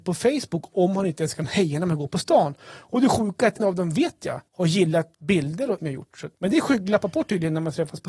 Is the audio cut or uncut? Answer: cut